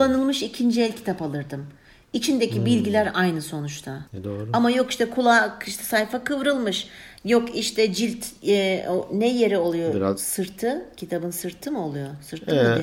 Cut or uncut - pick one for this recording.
cut